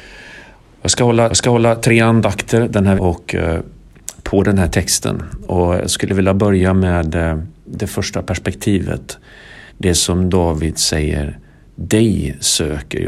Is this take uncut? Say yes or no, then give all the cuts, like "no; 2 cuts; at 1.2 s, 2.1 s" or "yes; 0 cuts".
no; 3 cuts; at 1.3 s, 3.0 s, 9.7 s